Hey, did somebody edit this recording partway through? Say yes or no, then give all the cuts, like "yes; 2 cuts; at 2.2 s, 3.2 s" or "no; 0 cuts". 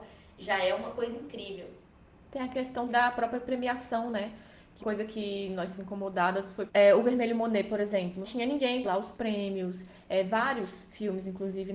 yes; 6 cuts; at 2.9 s, 4.8 s, 5.8 s, 6.7 s, 8.2 s, 8.8 s